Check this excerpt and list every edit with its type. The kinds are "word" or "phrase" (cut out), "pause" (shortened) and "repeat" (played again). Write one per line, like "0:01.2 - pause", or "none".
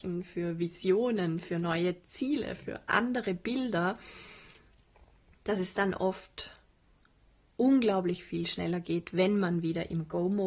none